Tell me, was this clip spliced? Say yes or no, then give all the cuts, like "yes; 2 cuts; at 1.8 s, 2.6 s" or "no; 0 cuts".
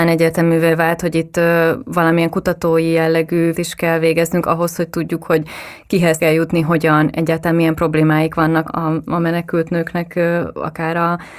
yes; 3 cuts; at 3.5 s, 6.2 s, 8.7 s